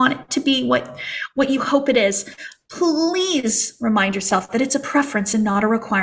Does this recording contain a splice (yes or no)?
no